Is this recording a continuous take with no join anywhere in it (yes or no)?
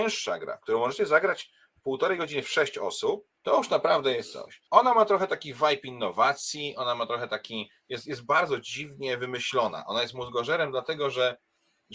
no